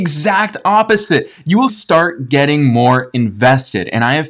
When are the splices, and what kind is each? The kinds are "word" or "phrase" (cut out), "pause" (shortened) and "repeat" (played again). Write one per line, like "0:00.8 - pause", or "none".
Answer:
0:01.7 - phrase

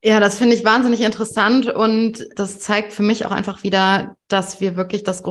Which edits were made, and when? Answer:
0:02.3 - word

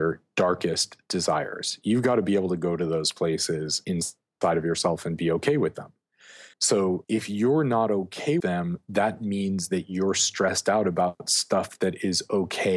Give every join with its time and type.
0:06.5 - pause
0:08.4 - word

